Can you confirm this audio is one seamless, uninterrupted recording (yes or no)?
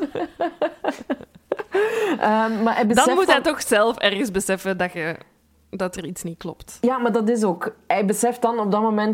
yes